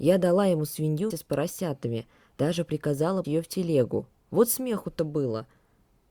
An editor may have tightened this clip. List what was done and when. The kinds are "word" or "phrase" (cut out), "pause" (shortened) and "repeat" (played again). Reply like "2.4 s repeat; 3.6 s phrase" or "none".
1.1 s word; 3.2 s word